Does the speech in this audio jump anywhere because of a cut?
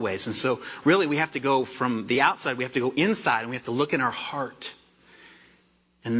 no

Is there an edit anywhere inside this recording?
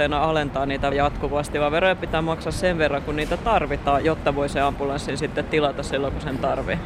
yes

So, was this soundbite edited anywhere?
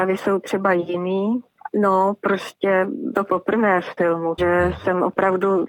yes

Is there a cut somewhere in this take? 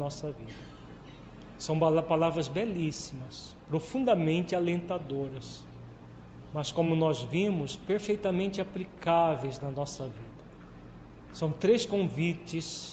no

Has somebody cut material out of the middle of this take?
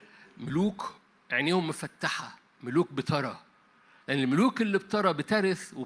no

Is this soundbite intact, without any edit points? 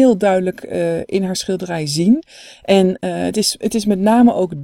yes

